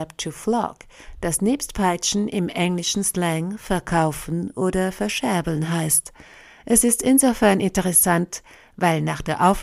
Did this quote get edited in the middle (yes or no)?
no